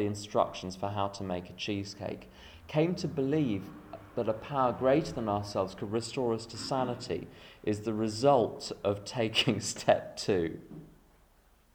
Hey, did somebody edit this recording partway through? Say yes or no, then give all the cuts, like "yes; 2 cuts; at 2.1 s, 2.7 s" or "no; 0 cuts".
no; 0 cuts